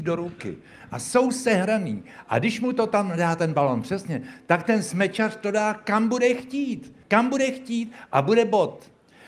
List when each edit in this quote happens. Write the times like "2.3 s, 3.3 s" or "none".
7.0 s